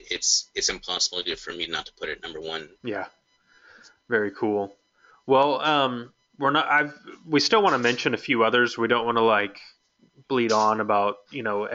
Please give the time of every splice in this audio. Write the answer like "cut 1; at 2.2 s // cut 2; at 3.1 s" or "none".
cut 1; at 2.8 s